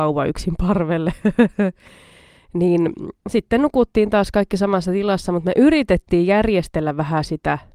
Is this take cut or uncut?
cut